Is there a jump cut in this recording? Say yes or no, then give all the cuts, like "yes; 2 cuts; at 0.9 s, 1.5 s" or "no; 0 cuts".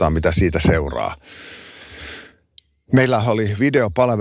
no; 0 cuts